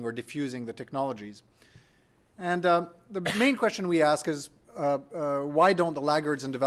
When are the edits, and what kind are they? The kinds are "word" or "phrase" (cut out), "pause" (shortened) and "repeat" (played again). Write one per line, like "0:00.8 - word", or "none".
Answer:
none